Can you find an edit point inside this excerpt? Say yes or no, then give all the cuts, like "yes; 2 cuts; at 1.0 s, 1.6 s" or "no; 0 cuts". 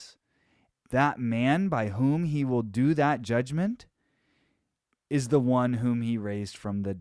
no; 0 cuts